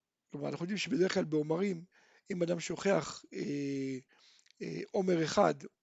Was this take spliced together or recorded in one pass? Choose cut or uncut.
uncut